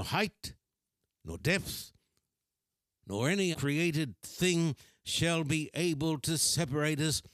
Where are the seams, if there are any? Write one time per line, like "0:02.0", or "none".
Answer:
0:03.5